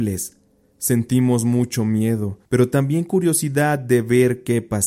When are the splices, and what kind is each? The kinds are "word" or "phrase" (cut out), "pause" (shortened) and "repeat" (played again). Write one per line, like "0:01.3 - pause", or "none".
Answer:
0:02.5 - pause